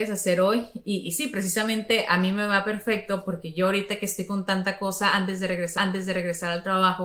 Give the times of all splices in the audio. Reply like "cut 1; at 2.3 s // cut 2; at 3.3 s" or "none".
cut 1; at 5.8 s